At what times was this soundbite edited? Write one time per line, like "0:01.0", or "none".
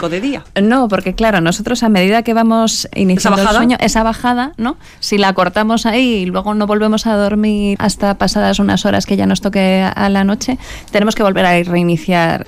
none